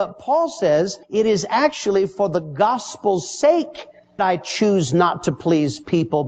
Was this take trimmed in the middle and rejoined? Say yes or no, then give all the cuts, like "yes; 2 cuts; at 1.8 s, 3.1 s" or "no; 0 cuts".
yes; 2 cuts; at 1.0 s, 4.2 s